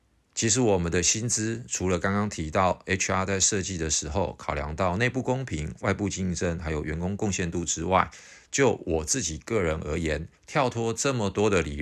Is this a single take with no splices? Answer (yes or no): no